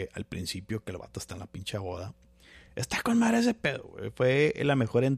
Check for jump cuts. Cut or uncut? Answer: uncut